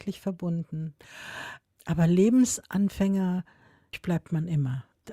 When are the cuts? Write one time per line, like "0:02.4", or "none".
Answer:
0:03.9